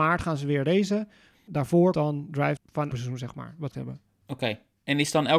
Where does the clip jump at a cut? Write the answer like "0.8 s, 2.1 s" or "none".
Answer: 1.9 s, 2.6 s, 2.9 s, 3.7 s